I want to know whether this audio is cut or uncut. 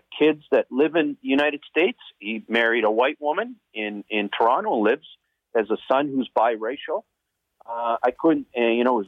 uncut